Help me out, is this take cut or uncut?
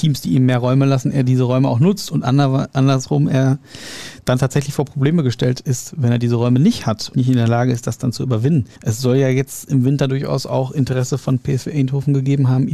cut